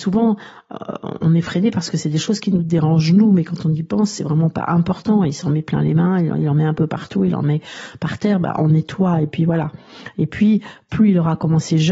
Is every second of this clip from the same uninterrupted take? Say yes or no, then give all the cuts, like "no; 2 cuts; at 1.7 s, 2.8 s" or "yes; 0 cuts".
yes; 0 cuts